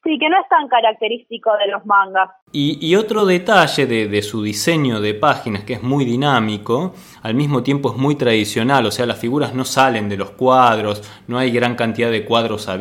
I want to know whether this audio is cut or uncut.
uncut